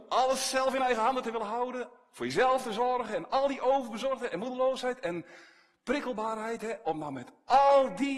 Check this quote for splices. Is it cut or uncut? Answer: uncut